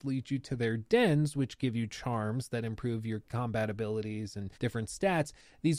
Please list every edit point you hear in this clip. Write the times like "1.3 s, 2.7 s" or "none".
4.6 s